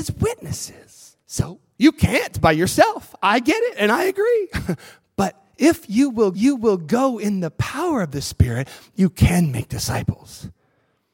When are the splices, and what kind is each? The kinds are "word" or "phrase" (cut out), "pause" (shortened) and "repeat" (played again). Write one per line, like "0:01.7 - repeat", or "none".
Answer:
0:01.2 - pause
0:06.3 - repeat